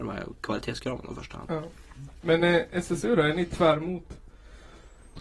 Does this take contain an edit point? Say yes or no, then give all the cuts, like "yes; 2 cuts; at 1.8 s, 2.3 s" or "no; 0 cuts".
no; 0 cuts